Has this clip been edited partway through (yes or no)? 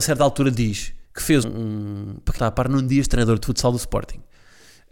yes